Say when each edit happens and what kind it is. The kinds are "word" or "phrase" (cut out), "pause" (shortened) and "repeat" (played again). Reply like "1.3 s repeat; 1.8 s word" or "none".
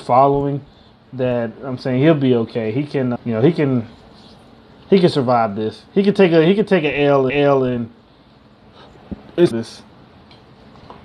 3.2 s word; 7.3 s repeat; 9.5 s word

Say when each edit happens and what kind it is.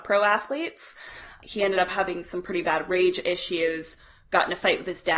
none

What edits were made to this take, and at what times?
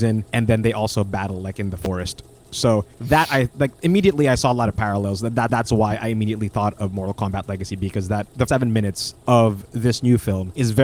2.9 s pause; 5.5 s repeat; 8.5 s word

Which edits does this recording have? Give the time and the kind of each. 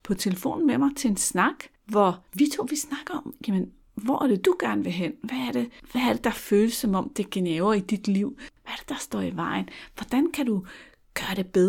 2.3 s pause

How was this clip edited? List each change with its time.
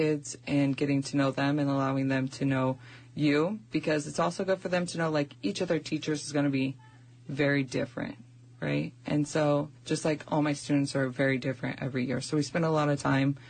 none

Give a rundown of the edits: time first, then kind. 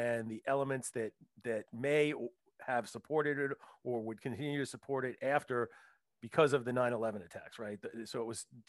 none

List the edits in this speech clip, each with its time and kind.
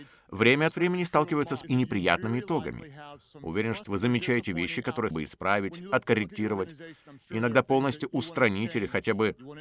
1.6 s word; 3.8 s phrase; 5.1 s word

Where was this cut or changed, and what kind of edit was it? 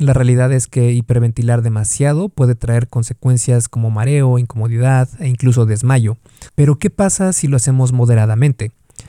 6.5 s pause

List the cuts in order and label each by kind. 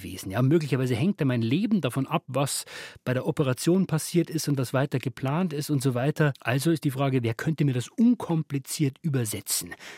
none

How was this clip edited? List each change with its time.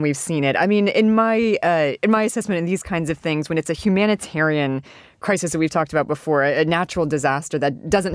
none

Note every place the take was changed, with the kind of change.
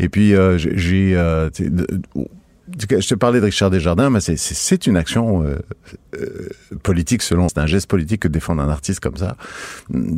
7.5 s word

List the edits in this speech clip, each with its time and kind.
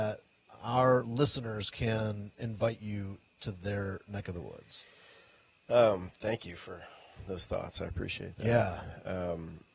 none

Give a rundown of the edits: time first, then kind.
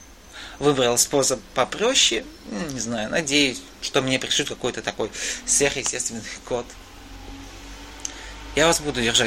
3.7 s pause

